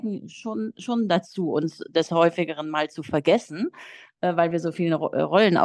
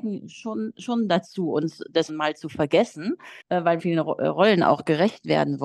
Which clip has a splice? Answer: second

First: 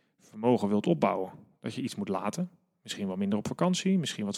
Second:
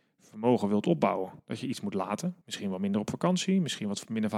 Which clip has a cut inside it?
second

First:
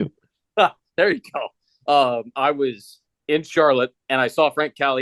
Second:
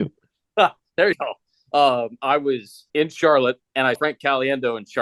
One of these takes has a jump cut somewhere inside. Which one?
second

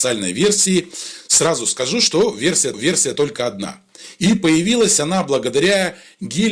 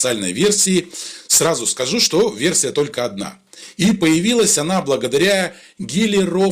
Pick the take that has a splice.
first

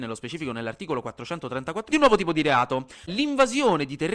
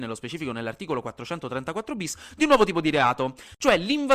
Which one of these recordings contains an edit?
first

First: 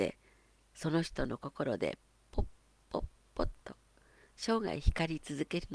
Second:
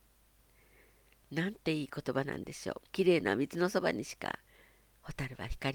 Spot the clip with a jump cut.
second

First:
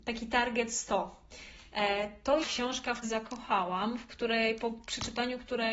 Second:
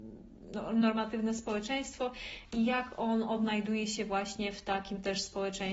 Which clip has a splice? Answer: first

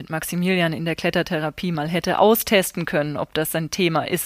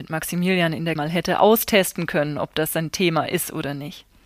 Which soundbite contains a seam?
second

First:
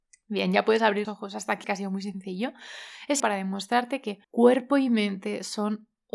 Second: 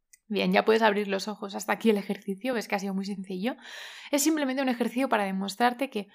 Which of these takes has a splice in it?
first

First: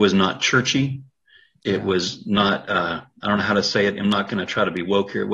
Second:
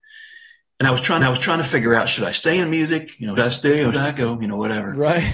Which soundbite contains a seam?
second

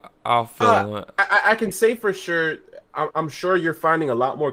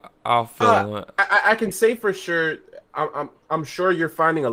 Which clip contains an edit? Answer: first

